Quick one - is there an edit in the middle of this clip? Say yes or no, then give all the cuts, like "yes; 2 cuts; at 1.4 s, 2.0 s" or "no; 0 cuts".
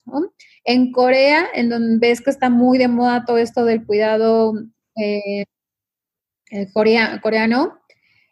no; 0 cuts